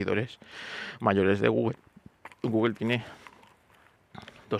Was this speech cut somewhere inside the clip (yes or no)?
no